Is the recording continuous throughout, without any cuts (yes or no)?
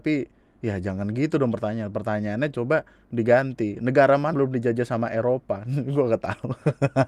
no